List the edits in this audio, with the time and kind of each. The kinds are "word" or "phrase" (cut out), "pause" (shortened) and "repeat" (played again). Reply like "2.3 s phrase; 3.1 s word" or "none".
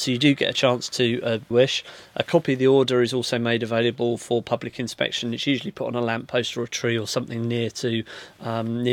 1.5 s phrase